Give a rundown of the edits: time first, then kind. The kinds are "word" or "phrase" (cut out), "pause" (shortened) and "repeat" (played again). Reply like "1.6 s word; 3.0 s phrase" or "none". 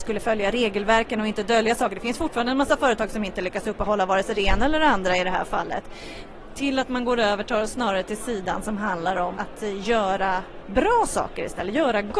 9.4 s word